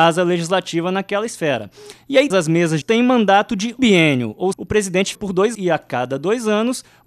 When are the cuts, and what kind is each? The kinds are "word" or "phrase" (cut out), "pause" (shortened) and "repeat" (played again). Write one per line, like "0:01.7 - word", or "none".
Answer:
0:02.3 - word
0:02.8 - word
0:03.8 - word
0:04.5 - word
0:05.1 - word
0:05.5 - word

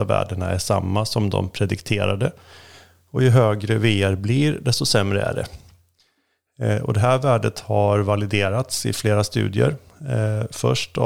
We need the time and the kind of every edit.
none

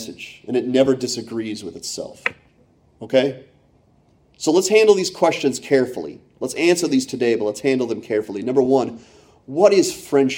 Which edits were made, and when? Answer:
none

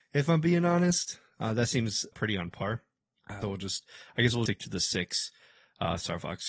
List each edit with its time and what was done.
0:02.1 - word
0:03.4 - word
0:04.5 - word

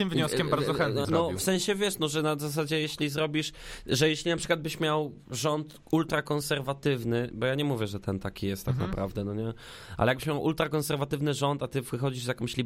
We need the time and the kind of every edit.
0:01.0 - word

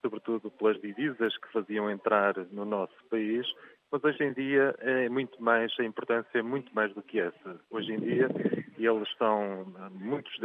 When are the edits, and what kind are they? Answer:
none

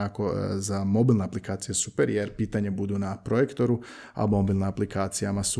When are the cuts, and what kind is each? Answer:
none

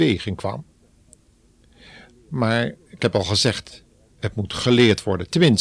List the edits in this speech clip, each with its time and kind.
none

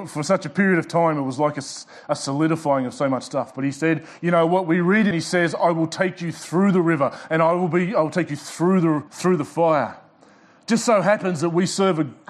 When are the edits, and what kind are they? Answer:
0:05.1 - phrase
0:09.1 - pause

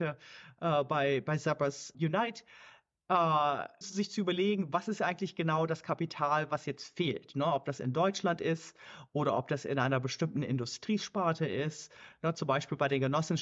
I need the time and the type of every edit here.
0:01.9 - word
0:03.8 - word

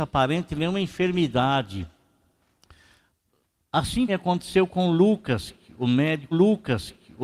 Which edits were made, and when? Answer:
0:04.1 - word
0:06.3 - repeat

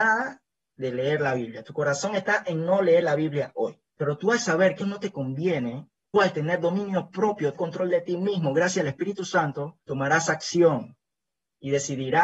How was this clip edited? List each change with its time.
0:03.9 - pause
0:04.8 - word
0:06.1 - word
0:07.5 - word
0:09.8 - pause

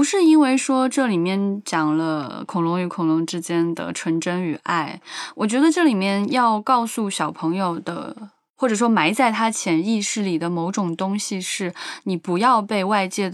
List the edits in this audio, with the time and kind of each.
none

